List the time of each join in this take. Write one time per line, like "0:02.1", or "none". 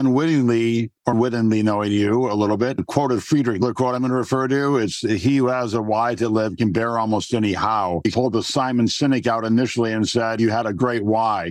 0:01.1